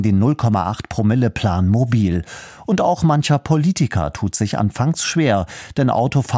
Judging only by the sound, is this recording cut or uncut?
uncut